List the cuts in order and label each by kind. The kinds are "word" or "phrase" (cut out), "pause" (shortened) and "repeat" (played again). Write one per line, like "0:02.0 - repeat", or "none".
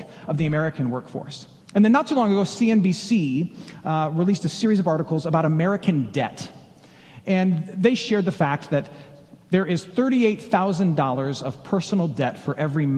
0:01.6 - pause
0:09.4 - pause